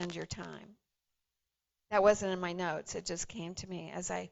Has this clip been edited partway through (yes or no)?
no